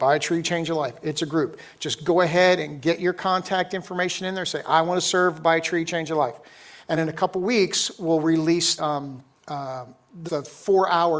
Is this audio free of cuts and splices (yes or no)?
no